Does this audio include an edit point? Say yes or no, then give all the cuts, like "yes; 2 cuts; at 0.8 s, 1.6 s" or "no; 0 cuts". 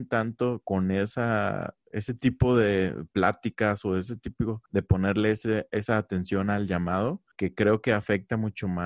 yes; 2 cuts; at 4.7 s, 7.3 s